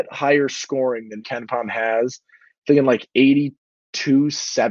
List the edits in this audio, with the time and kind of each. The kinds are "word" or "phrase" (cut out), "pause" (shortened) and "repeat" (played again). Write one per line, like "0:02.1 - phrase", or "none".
0:01.2 - word